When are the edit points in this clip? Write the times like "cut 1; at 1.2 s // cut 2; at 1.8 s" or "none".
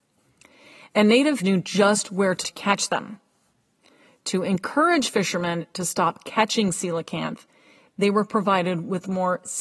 cut 1; at 1.4 s // cut 2; at 2.4 s